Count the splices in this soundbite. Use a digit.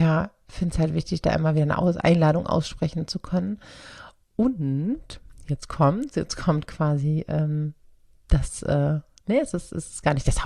0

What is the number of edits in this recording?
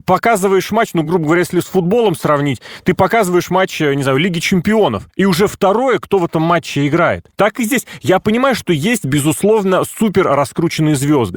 0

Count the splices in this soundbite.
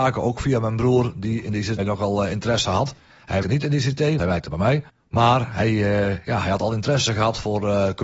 5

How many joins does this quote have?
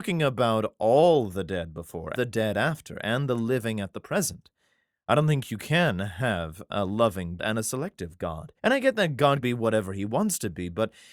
4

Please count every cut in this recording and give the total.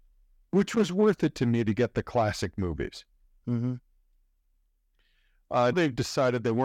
1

